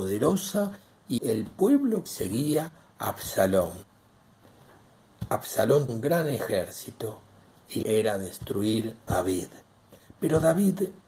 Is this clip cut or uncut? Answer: cut